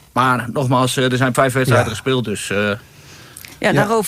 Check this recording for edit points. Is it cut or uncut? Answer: cut